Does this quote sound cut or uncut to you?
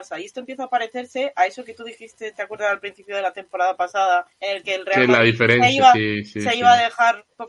cut